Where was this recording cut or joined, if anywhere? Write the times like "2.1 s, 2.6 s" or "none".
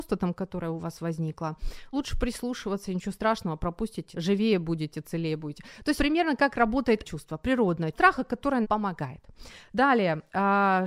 1.9 s, 4.1 s, 6.0 s, 7.0 s, 7.9 s, 8.6 s